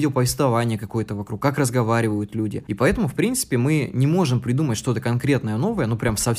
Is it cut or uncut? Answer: uncut